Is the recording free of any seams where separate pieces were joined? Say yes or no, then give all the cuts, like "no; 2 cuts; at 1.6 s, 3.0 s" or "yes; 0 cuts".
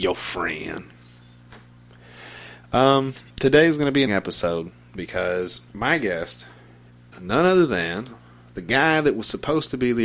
no; 4 cuts; at 3.3 s, 4.1 s, 5.7 s, 7.1 s